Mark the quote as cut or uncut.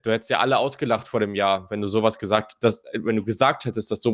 uncut